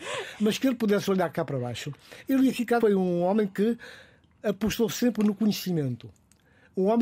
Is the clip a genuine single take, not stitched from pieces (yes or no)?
no